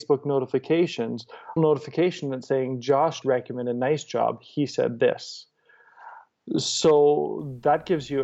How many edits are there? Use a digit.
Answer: 2